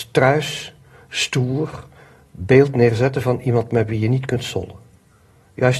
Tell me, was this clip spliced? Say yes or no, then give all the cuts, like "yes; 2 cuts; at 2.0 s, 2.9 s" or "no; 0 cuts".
no; 0 cuts